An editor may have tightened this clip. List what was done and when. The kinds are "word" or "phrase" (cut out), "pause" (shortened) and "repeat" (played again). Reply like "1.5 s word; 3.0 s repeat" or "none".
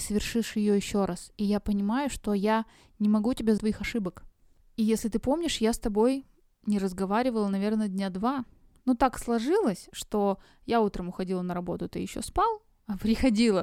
3.6 s phrase